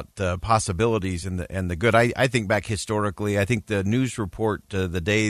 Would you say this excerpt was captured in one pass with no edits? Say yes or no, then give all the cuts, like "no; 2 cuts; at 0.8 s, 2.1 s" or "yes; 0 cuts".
yes; 0 cuts